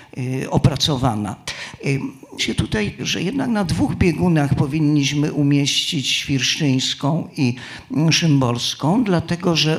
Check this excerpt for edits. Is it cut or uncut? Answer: cut